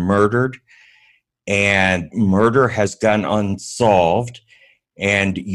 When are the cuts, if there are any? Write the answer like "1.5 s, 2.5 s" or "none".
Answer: 2.1 s